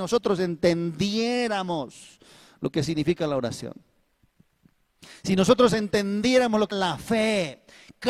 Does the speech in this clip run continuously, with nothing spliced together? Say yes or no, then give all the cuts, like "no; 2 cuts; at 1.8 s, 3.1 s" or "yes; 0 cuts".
no; 1 cut; at 6.7 s